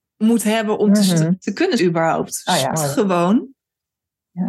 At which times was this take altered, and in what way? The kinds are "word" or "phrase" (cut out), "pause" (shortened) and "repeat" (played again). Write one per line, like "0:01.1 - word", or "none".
0:01.8 - word
0:02.7 - word